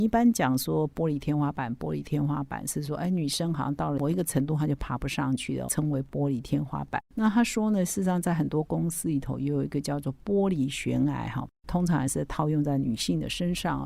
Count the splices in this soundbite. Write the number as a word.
three